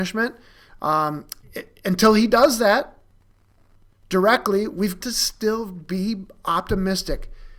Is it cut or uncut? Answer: cut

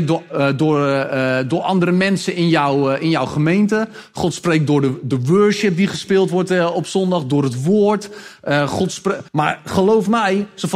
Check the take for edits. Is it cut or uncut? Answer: cut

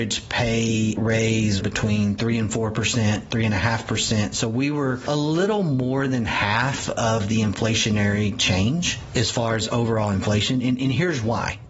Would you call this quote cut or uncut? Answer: cut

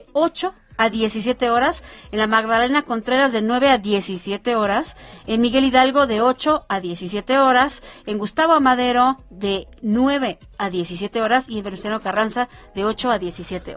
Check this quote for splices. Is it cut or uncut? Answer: uncut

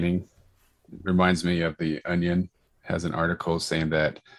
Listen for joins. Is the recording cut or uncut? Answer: uncut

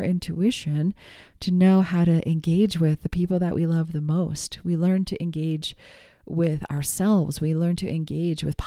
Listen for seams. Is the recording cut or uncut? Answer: uncut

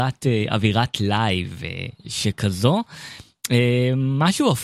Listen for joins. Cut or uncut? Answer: uncut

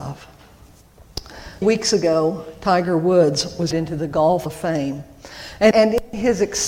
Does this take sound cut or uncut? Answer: cut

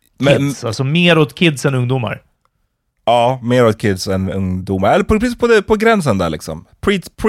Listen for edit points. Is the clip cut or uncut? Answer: uncut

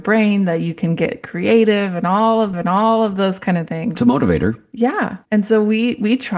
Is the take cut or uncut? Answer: cut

